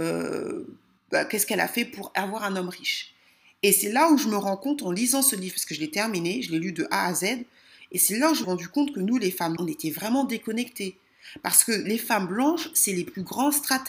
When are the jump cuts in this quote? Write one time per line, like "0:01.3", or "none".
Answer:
0:01.0
0:08.4
0:09.6